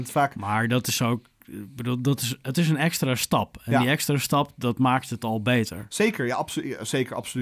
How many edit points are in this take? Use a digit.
0